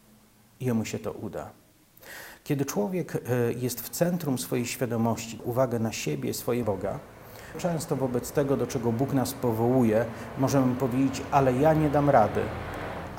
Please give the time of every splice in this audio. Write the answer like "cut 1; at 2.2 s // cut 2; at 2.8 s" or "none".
cut 1; at 5.4 s // cut 2; at 6.6 s // cut 3; at 7.5 s